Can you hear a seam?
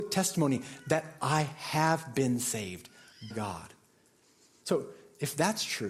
yes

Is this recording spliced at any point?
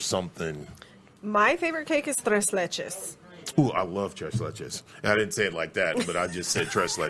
no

